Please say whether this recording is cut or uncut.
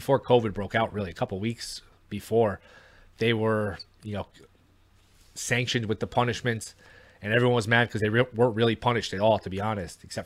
uncut